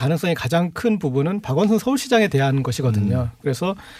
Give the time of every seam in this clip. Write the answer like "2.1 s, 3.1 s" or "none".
none